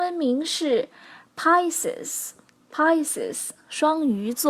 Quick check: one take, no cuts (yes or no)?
no